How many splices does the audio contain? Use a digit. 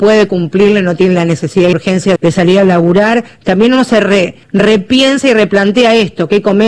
3